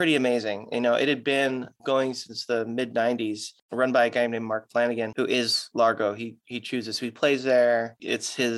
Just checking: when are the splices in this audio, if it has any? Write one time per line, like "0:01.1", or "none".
none